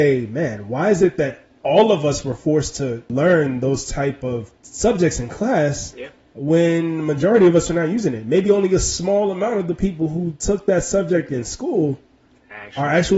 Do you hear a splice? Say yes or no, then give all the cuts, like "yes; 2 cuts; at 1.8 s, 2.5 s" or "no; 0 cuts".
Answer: no; 0 cuts